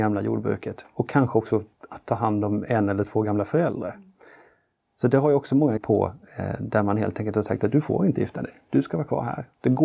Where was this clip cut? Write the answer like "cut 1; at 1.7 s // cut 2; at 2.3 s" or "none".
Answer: cut 1; at 5.8 s